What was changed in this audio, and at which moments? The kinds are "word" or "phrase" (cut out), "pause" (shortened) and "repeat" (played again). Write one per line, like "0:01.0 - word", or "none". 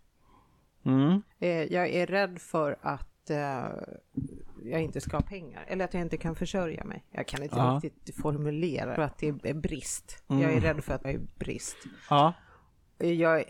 0:01.3 - pause
0:09.0 - phrase
0:11.0 - word